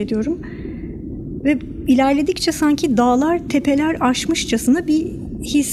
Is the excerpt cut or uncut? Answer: uncut